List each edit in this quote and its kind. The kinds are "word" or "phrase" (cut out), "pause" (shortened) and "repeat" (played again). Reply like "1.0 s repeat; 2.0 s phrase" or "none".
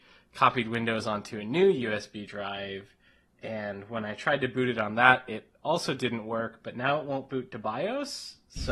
none